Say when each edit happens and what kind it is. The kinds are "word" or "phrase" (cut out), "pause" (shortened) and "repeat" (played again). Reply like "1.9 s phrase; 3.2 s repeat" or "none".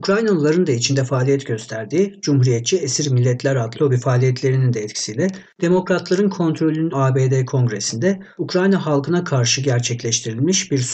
3.7 s word; 6.9 s word; 8.4 s word